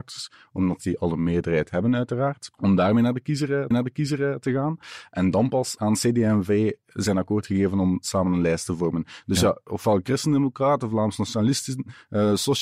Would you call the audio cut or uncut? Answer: cut